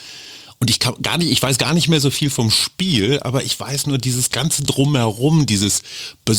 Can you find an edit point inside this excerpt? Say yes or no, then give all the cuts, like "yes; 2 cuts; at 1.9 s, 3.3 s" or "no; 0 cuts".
no; 0 cuts